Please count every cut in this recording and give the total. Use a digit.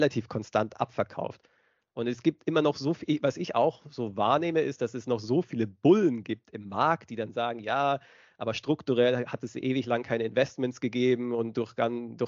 0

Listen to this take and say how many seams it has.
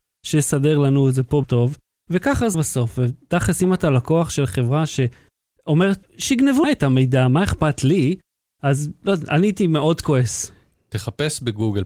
4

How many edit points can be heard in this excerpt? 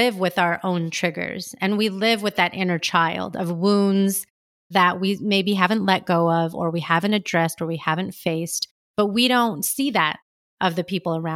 1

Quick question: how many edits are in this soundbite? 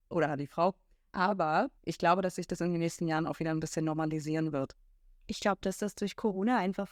1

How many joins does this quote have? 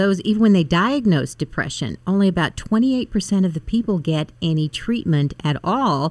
0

